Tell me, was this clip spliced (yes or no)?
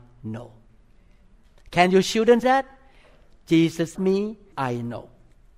yes